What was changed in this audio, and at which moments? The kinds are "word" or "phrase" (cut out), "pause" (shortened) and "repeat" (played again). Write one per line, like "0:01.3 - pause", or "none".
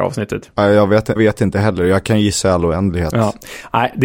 0:01.2 - word